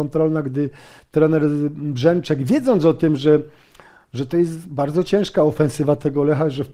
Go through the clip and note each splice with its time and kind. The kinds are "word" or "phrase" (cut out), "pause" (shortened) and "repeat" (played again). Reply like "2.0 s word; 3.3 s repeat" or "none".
5.0 s word